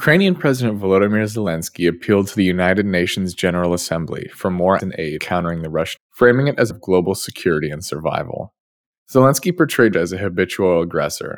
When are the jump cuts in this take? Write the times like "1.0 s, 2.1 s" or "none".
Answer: 4.8 s, 5.2 s, 6.0 s, 6.7 s, 8.8 s, 9.9 s